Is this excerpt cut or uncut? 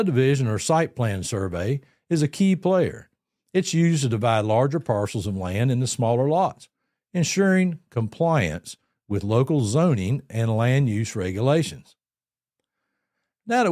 uncut